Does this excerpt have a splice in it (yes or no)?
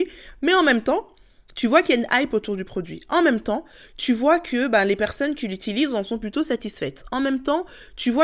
no